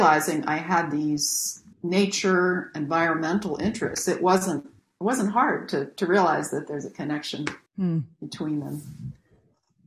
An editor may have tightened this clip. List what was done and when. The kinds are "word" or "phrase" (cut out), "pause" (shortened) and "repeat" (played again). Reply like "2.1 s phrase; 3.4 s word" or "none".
1.7 s pause; 7.7 s pause